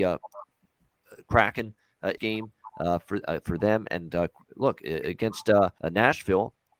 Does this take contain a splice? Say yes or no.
yes